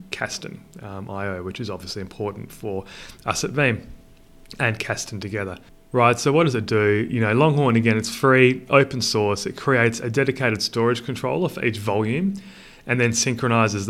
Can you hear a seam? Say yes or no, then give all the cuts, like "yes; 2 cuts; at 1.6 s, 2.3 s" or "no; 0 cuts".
no; 0 cuts